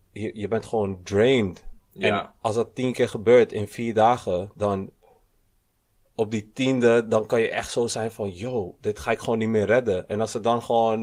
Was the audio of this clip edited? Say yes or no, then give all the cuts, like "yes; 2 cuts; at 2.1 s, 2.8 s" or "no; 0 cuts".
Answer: no; 0 cuts